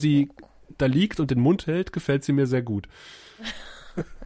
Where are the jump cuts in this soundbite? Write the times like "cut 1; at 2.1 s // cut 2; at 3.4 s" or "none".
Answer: none